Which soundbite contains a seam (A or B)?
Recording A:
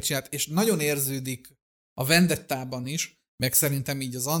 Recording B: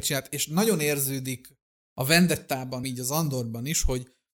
B